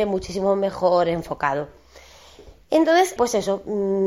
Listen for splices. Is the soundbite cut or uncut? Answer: cut